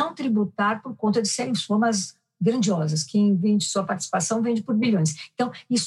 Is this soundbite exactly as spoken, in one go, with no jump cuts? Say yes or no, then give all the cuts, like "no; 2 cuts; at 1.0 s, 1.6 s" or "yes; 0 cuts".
yes; 0 cuts